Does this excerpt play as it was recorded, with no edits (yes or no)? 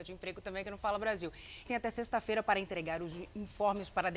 no